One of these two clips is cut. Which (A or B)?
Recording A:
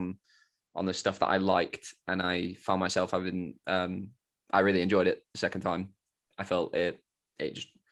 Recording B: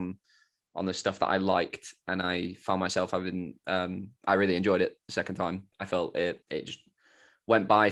B